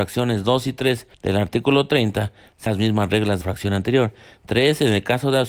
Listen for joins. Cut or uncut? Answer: cut